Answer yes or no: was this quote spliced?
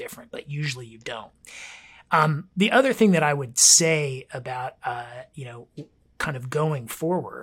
no